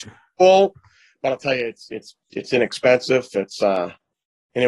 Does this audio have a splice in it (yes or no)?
no